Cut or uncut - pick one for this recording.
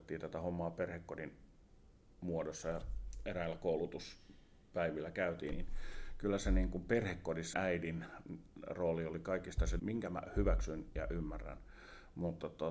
cut